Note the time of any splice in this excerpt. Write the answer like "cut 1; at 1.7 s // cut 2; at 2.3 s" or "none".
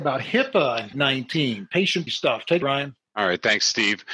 cut 1; at 0.9 s // cut 2; at 2.1 s // cut 3; at 2.6 s